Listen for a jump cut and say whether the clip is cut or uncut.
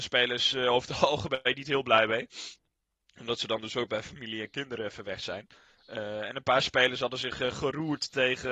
uncut